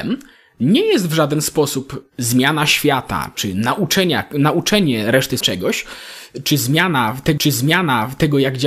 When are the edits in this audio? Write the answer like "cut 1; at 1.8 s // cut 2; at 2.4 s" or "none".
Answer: cut 1; at 2.1 s // cut 2; at 5.4 s // cut 3; at 7.4 s